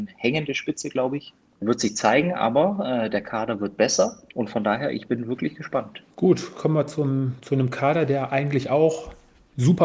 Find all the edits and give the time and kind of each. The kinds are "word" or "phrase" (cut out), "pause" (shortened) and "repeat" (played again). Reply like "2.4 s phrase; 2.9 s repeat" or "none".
1.6 s word; 4.3 s pause; 6.1 s pause